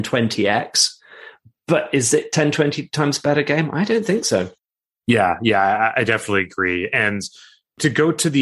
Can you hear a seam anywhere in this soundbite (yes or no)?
no